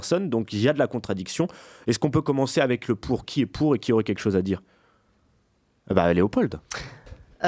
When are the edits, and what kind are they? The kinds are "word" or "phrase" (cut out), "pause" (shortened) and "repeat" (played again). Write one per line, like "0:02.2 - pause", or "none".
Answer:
none